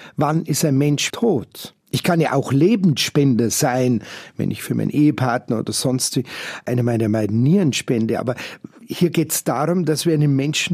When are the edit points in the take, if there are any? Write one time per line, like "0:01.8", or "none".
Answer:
0:01.1
0:01.8